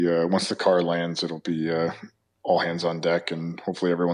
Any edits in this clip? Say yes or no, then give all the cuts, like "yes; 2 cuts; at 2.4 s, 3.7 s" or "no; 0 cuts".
no; 0 cuts